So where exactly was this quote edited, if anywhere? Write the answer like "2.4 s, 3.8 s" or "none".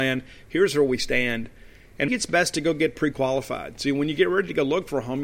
2.1 s